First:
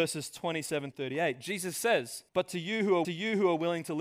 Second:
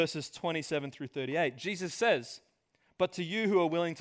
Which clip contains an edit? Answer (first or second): first